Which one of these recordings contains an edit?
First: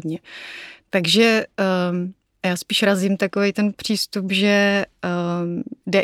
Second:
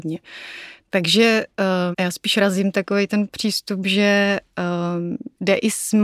second; 1 cut; at 1.9 s

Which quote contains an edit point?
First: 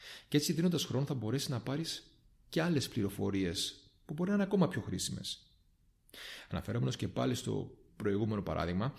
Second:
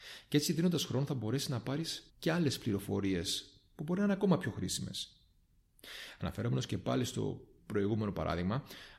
second; 1 cut; at 2.1 s

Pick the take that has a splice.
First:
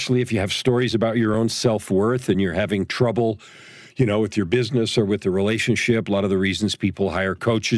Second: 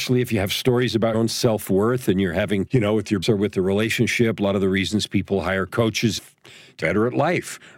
second; 5 cuts; at 1.1 s, 2.7 s, 3.2 s, 6.2 s, 6.8 s

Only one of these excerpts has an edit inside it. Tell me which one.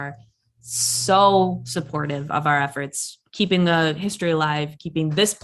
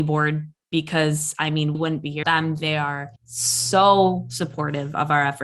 second; 3 cuts; at 1.7 s, 2.2 s, 3.2 s

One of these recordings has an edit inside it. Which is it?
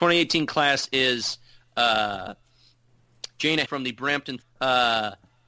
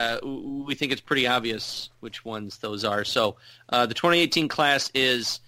first; 2 cuts; at 3.6 s, 4.4 s

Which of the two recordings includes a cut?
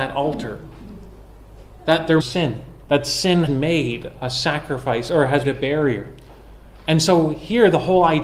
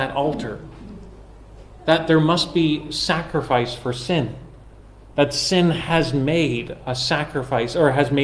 first; 4 cuts; at 2.2 s, 2.8 s, 3.5 s, 5.4 s

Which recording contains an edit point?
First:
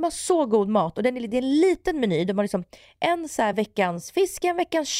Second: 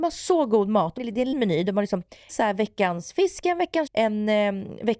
second; 4 cuts; at 1.0 s, 1.3 s, 2.3 s, 3.9 s

